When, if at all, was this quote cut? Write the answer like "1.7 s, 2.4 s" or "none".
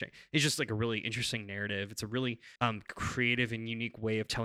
2.6 s